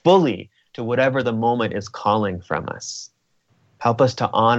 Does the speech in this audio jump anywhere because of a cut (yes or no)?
no